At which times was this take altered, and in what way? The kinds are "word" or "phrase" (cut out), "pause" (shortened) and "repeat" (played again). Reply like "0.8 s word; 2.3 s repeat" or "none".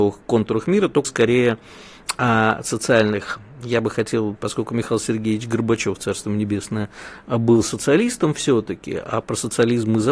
1.0 s word

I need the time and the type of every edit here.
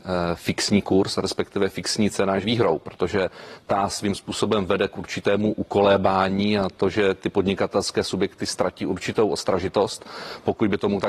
2.4 s word

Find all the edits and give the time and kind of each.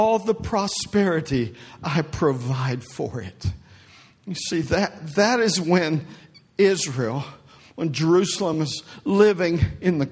none

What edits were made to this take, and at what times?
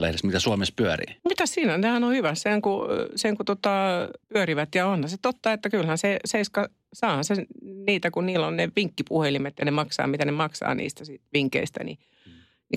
1.2 s pause; 4.2 s pause

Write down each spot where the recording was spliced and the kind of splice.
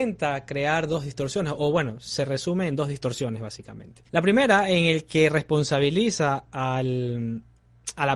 4.1 s pause

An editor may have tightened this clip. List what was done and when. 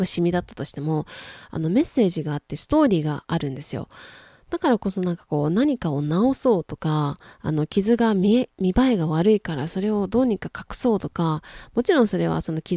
none

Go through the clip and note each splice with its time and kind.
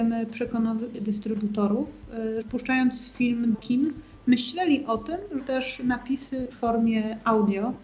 0.9 s word; 2.4 s word; 3.5 s word; 5.4 s word; 6.5 s word

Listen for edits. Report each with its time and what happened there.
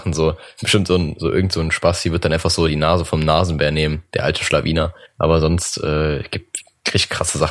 5.0 s pause

